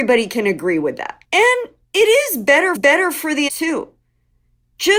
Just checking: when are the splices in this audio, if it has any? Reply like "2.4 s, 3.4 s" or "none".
1.2 s, 2.8 s, 3.5 s

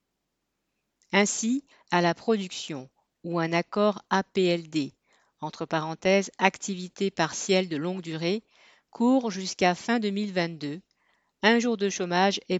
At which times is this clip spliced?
none

